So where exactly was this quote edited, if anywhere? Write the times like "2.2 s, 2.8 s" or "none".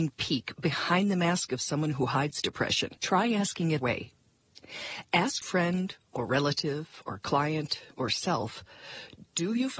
3.0 s, 3.8 s, 5.4 s, 7.9 s